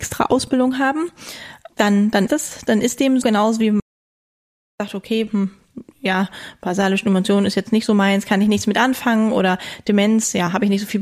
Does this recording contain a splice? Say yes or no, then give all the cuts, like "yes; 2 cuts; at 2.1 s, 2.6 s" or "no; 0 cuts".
yes; 3 cuts; at 1.7 s, 2.3 s, 3.2 s